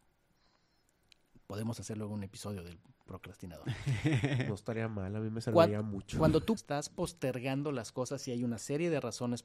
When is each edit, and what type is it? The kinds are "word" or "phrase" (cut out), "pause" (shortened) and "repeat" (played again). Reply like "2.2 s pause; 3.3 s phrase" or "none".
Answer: 6.6 s phrase